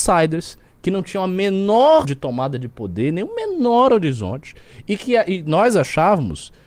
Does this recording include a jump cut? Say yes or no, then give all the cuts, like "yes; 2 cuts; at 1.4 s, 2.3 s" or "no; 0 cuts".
yes; 1 cut; at 2.0 s